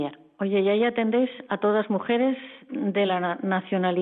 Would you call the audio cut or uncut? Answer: uncut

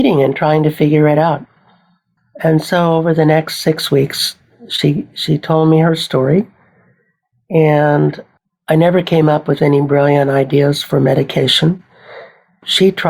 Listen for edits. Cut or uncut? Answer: uncut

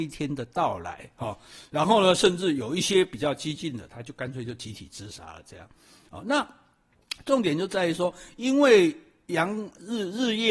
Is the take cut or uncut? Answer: uncut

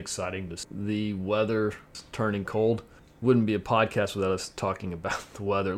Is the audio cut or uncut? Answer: uncut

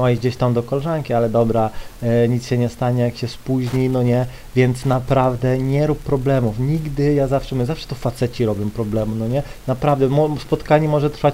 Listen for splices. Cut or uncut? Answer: uncut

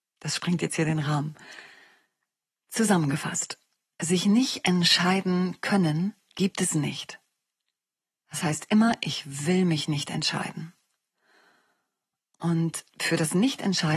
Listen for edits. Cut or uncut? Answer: uncut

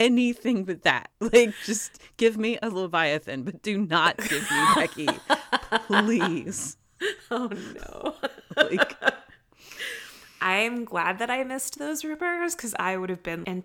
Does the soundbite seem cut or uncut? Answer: uncut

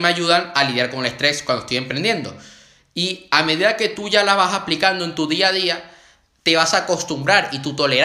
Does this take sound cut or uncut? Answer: uncut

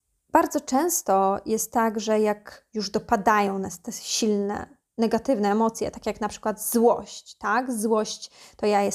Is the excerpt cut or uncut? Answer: cut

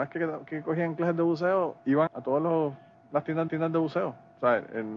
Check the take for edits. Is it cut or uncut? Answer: cut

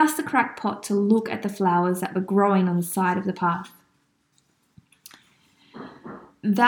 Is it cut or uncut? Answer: uncut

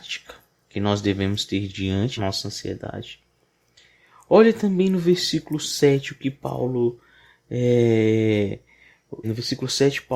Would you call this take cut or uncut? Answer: cut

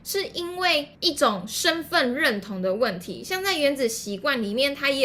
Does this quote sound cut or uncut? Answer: cut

